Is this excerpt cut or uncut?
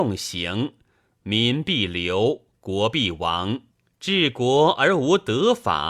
cut